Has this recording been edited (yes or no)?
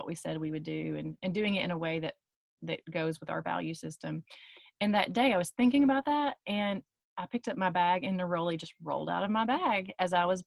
no